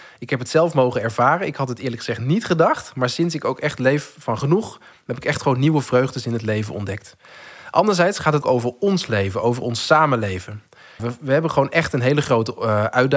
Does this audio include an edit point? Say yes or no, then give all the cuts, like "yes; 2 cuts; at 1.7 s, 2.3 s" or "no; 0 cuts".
yes; 2 cuts; at 8.4 s, 11.0 s